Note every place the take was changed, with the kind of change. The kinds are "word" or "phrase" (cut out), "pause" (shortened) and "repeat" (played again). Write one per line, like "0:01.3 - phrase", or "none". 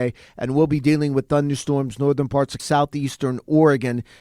0:02.6 - word